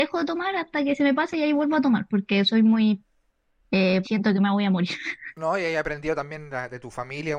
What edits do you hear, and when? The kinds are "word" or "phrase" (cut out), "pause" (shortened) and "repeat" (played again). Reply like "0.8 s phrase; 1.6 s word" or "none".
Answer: 4.0 s phrase